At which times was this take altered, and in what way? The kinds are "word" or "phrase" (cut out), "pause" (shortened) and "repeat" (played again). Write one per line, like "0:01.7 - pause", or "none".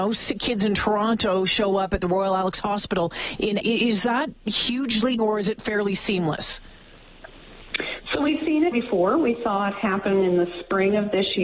0:03.6 - word
0:05.2 - word
0:08.7 - word